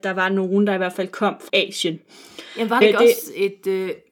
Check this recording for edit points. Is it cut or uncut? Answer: cut